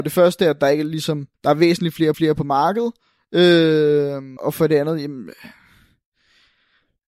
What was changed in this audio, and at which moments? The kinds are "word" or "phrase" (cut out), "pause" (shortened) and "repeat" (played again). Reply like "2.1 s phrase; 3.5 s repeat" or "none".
1.3 s pause; 2.1 s repeat; 4.4 s word